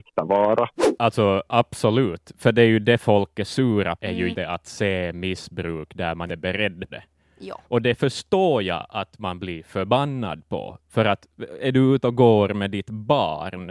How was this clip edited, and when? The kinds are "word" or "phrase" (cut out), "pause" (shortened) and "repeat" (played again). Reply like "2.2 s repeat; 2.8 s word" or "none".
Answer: 4.0 s word; 4.3 s word; 6.3 s word; 6.9 s word